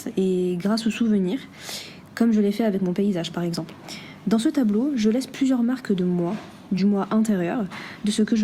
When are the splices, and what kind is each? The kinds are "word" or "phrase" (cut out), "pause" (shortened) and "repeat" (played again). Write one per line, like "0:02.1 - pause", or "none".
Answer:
none